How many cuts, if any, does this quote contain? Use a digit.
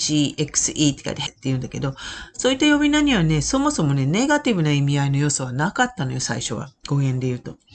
1